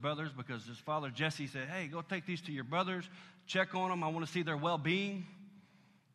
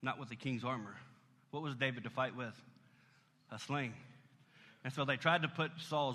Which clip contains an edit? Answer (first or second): second